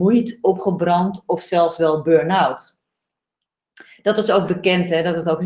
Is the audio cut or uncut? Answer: uncut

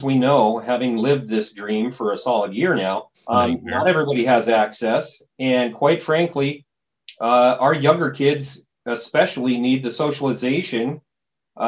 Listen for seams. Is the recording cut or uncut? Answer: cut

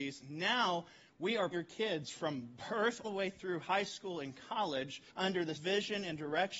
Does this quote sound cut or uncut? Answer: cut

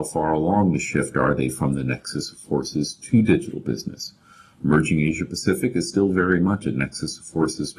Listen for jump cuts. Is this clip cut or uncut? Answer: uncut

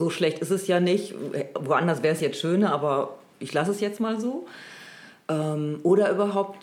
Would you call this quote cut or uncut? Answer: uncut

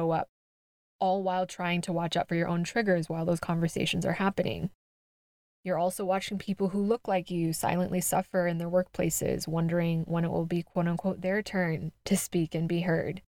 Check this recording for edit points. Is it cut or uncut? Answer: uncut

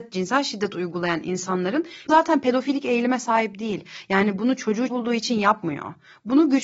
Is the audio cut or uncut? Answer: cut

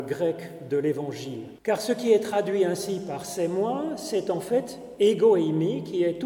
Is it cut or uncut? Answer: cut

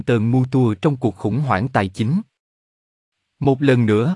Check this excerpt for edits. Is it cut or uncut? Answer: uncut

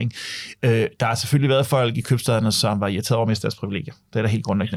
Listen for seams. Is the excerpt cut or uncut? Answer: uncut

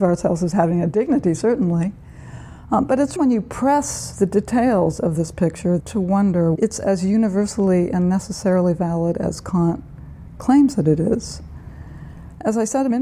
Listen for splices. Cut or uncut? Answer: cut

